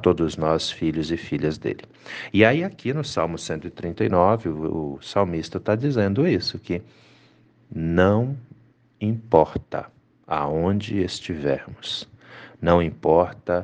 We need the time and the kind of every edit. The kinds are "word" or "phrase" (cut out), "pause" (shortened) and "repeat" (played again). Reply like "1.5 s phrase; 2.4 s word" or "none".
none